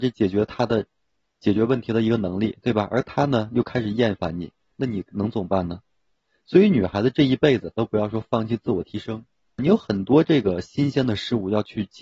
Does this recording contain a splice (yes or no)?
yes